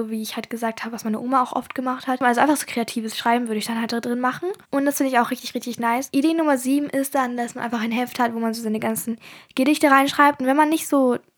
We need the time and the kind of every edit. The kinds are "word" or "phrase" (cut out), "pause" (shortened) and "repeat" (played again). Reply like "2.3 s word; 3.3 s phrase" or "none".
4.6 s pause